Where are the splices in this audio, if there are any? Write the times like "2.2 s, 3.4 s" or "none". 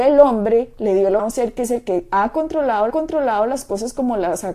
1.2 s, 2.9 s